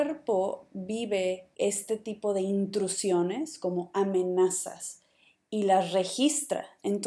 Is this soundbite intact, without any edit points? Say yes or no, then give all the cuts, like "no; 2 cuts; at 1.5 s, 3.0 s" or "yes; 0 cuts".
yes; 0 cuts